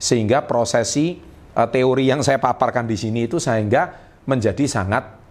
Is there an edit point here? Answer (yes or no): no